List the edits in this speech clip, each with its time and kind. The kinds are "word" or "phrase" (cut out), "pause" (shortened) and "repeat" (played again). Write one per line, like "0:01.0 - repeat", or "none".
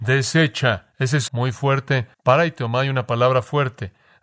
0:00.9 - pause
0:01.3 - phrase
0:02.1 - pause